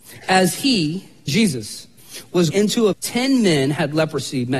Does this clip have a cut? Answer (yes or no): yes